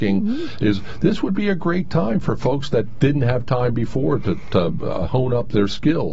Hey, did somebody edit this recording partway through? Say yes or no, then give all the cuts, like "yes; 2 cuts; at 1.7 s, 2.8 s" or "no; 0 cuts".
no; 0 cuts